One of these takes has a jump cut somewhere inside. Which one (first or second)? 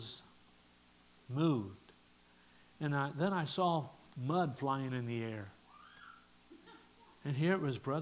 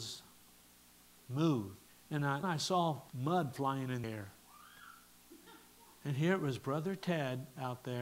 second